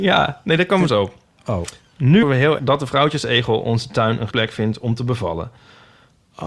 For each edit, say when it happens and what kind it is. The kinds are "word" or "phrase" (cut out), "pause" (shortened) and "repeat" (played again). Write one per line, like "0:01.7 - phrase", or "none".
0:02.2 - word
0:02.6 - word
0:04.3 - word